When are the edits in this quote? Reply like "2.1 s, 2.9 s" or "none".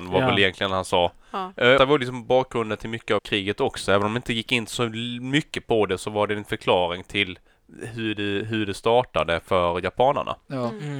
1.8 s, 3.2 s